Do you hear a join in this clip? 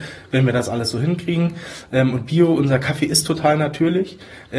no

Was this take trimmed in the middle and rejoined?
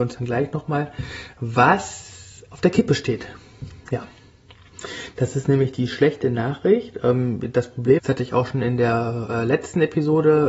yes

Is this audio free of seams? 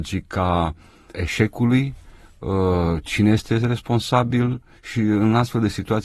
no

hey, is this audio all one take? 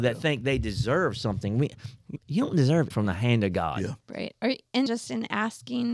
no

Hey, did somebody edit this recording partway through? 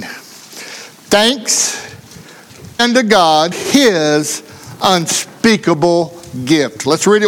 yes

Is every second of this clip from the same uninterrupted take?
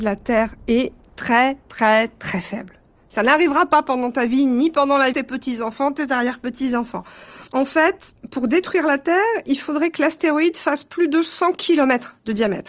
no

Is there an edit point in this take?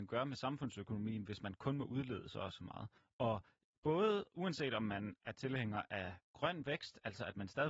yes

